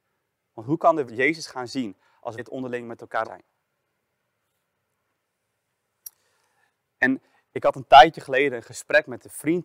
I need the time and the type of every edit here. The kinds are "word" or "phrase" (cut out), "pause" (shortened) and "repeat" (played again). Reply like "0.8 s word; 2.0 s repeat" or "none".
1.1 s word; 2.4 s word; 3.2 s word